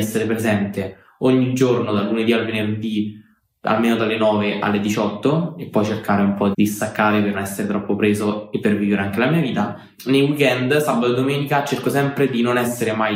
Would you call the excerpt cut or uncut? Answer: cut